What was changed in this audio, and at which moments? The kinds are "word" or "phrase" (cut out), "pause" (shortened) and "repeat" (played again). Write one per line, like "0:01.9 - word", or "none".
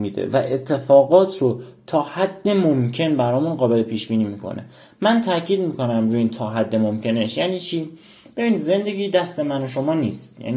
none